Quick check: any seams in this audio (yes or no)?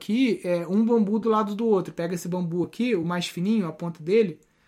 no